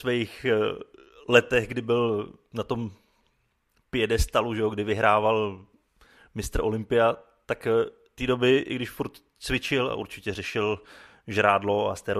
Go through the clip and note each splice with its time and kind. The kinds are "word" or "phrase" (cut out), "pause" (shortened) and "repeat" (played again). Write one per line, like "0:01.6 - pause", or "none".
0:08.2 - word